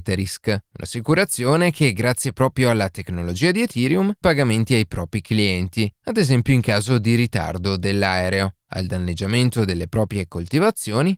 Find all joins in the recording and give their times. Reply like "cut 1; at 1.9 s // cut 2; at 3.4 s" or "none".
cut 1; at 4.2 s